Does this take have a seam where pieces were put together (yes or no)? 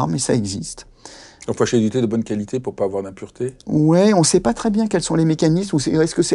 no